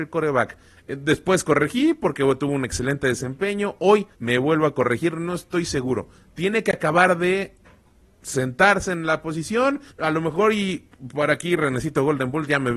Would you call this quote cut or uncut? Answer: cut